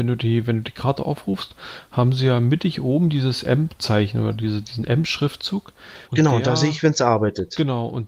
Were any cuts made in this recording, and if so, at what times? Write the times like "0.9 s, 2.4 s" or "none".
6.0 s

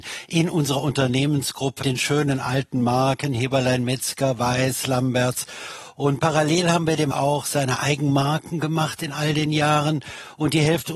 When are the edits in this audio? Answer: 1.8 s, 7.1 s

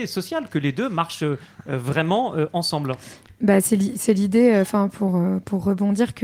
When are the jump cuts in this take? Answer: none

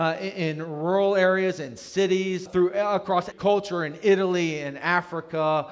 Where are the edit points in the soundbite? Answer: 2.5 s, 3.3 s

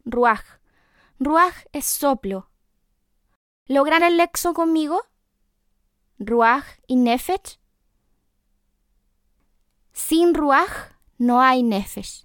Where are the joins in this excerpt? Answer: 4.0 s

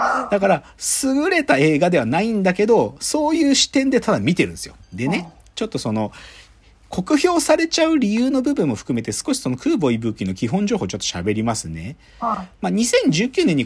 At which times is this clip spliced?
4.8 s

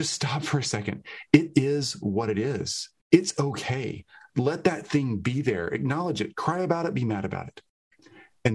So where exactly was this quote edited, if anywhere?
3.0 s

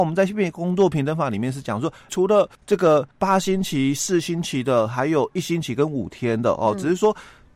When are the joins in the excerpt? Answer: 2.1 s, 2.5 s, 3.1 s

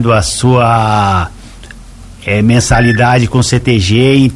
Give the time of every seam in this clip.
none

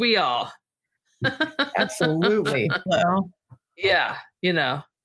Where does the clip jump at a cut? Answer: 2.9 s

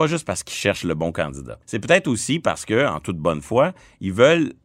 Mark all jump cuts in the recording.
1.6 s

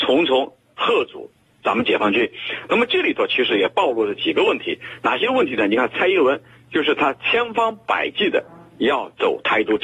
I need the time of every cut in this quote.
none

